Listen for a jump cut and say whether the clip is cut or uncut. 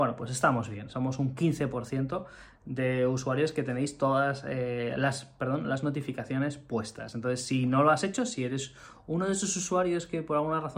uncut